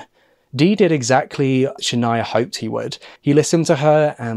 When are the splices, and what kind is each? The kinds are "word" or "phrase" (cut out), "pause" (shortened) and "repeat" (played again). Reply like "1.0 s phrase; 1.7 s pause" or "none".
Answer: 1.8 s word; 3.2 s pause